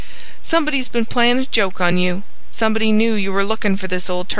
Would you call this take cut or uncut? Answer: uncut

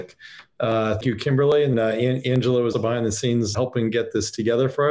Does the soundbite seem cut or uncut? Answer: cut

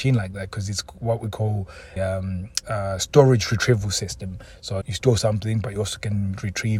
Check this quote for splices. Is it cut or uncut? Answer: cut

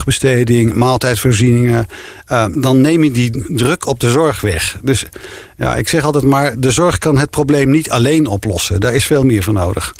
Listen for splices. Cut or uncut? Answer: cut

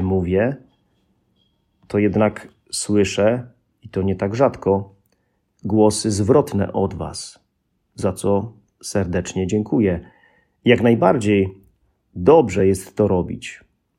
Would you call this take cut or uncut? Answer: uncut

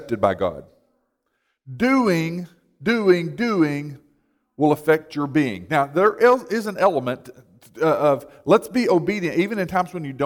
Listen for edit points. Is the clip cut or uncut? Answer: uncut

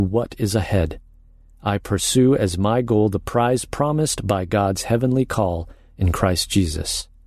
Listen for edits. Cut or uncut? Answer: uncut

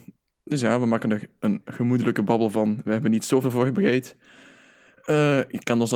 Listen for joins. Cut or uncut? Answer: uncut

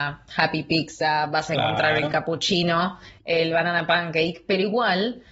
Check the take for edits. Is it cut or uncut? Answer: uncut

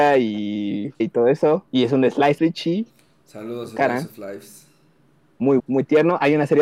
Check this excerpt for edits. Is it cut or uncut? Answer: cut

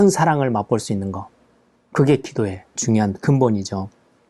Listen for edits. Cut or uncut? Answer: cut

